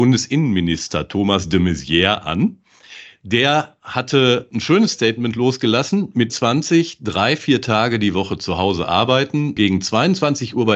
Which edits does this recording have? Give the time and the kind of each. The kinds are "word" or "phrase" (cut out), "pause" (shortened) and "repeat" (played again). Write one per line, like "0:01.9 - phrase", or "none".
0:06.3 - word
0:09.6 - word